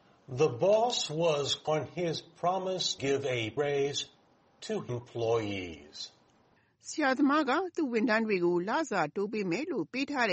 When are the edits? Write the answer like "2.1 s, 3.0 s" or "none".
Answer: 1.7 s, 3.0 s, 3.6 s, 4.9 s

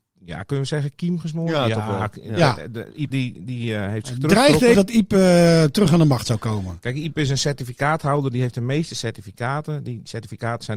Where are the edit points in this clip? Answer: 3.1 s, 4.7 s

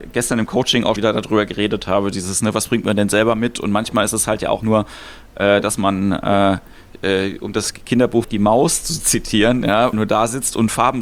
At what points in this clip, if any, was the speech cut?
1.0 s, 4.6 s, 8.2 s, 9.9 s

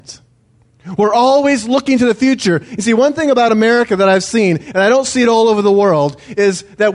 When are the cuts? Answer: none

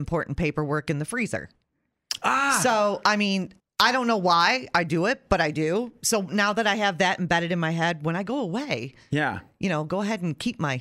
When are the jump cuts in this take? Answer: 3.6 s

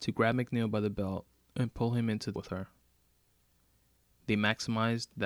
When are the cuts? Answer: 2.4 s

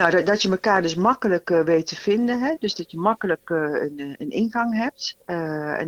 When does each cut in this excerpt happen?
none

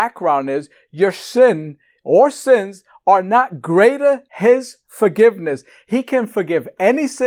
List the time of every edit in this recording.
4.3 s

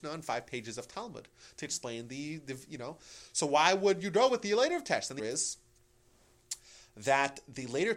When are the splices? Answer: 5.2 s

